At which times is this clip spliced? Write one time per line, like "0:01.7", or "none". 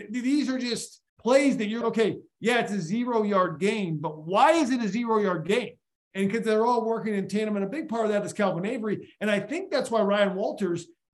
0:01.1
0:01.8